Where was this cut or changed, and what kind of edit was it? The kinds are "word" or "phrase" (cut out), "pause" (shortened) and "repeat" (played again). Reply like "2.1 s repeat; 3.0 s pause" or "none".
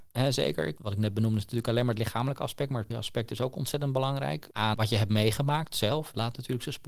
2.9 s word; 4.7 s word